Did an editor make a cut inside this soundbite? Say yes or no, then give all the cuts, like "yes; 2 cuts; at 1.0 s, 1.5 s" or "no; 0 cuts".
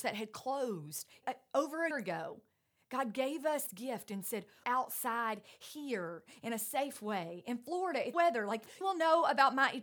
yes; 6 cuts; at 1.2 s, 1.9 s, 3.7 s, 4.6 s, 8.1 s, 8.8 s